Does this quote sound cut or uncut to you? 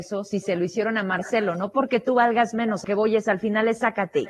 cut